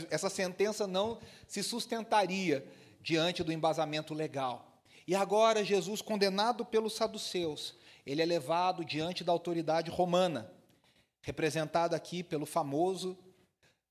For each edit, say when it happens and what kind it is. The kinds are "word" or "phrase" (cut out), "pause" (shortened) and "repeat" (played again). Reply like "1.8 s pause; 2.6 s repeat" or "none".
none